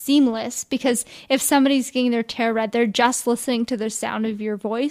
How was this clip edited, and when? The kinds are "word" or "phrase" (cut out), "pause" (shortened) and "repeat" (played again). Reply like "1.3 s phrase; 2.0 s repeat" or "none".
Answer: none